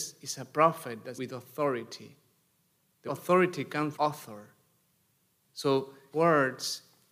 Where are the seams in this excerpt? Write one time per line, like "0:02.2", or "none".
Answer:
0:01.1
0:03.1
0:03.9
0:06.1